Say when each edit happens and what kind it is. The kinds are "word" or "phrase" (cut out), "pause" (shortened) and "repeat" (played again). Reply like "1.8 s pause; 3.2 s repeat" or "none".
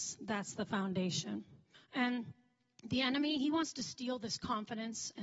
1.7 s pause